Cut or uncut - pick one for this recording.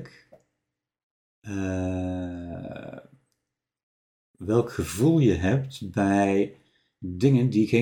uncut